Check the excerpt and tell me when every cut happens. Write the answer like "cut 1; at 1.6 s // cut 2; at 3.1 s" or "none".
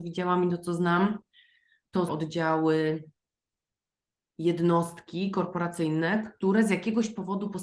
cut 1; at 2.1 s